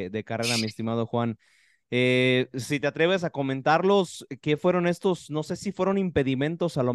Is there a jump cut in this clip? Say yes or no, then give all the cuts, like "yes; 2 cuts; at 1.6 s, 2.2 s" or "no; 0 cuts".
no; 0 cuts